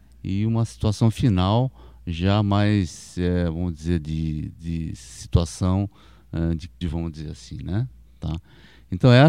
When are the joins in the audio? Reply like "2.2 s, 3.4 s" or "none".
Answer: 6.8 s